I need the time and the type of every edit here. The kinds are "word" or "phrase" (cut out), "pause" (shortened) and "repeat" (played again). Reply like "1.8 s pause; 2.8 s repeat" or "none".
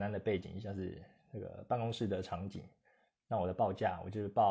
none